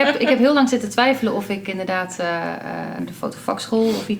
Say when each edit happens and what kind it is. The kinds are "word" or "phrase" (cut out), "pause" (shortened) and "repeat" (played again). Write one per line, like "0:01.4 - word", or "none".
0:03.0 - word